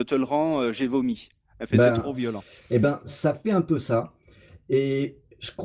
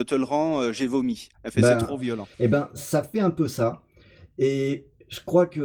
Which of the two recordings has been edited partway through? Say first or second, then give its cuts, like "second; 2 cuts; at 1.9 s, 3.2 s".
second; 2 cuts; at 1.3 s, 2.3 s